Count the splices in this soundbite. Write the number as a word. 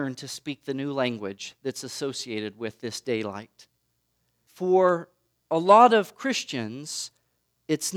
zero